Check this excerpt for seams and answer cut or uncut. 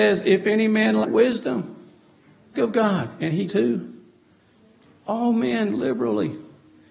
cut